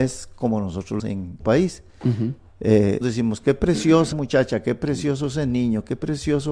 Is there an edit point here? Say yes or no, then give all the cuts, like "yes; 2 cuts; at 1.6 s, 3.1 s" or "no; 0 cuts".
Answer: yes; 4 cuts; at 1.0 s, 1.4 s, 3.0 s, 4.1 s